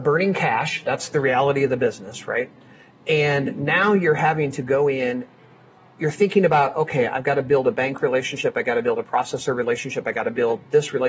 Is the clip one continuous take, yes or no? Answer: yes